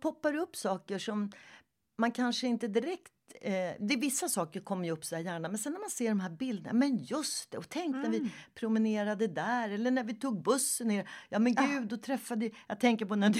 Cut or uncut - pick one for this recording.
uncut